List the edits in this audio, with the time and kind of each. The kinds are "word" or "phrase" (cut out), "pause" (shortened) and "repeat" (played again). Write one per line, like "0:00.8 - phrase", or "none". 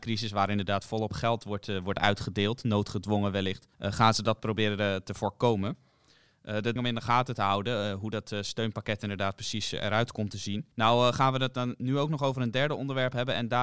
0:03.7 - pause
0:06.8 - phrase
0:10.7 - pause